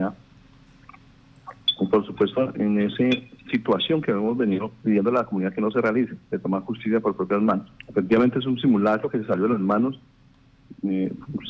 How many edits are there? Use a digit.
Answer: 1